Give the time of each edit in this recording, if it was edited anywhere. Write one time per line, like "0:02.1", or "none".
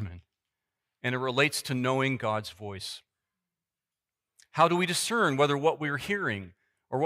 none